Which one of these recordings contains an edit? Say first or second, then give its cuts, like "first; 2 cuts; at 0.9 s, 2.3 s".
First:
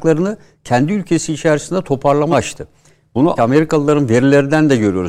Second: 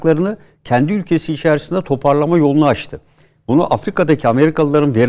first; 2 cuts; at 2.3 s, 3.4 s